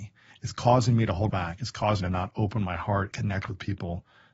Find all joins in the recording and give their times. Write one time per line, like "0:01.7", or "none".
0:01.3
0:02.0
0:03.1